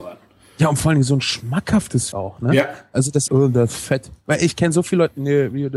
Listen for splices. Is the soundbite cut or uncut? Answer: cut